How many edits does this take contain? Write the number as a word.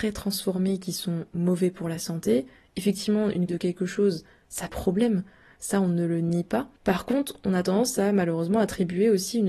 three